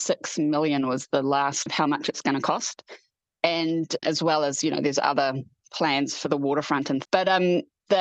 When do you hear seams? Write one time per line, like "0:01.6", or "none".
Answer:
0:01.7
0:04.0
0:07.0